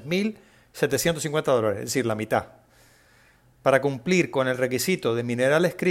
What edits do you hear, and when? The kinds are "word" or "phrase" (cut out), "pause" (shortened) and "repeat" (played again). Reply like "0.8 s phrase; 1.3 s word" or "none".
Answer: none